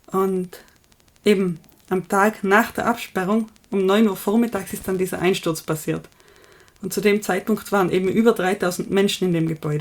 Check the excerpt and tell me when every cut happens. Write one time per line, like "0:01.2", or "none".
none